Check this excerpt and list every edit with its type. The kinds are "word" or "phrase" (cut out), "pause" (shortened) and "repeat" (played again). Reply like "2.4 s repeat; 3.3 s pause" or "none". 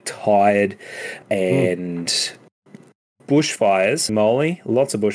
1.2 s word; 4.1 s word